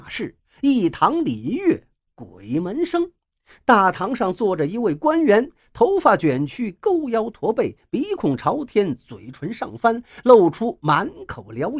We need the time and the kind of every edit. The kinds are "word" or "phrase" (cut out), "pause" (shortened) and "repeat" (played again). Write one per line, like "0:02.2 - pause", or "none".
none